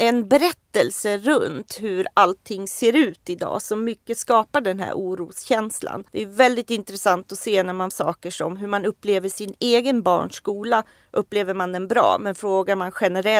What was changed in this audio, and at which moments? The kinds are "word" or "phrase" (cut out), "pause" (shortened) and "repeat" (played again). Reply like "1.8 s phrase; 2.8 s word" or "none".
6.1 s pause; 7.9 s word